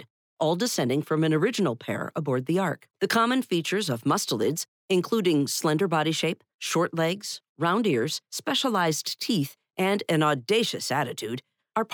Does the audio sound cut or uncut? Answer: cut